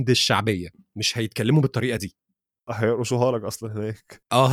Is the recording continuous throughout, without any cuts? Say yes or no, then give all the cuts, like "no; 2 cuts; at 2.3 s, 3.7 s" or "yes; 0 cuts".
yes; 0 cuts